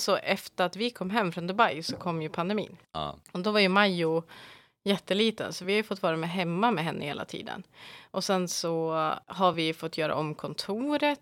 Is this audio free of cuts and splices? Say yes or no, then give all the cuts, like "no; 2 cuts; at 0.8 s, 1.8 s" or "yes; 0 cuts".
yes; 0 cuts